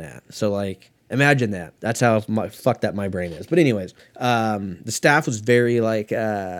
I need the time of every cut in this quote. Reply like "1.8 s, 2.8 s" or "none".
1.0 s, 1.8 s, 4.0 s